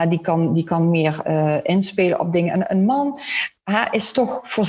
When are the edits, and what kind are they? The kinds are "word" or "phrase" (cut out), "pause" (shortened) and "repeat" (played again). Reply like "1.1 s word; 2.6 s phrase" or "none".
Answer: 1.2 s word